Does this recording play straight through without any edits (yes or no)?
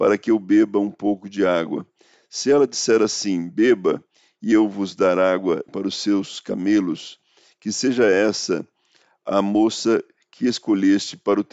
no